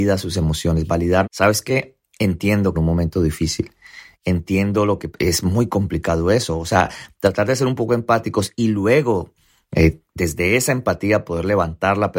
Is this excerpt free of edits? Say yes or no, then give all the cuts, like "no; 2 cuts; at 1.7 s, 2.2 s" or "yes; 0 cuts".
no; 3 cuts; at 1.2 s, 2.7 s, 5.1 s